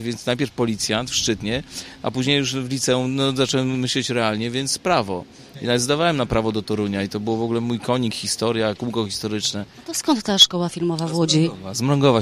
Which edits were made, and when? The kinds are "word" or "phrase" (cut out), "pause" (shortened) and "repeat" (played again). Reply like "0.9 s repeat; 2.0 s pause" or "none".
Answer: none